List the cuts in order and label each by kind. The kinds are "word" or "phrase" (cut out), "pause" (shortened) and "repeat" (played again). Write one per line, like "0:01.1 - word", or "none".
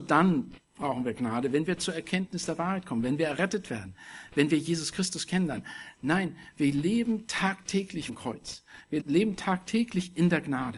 0:08.1 - word
0:09.0 - word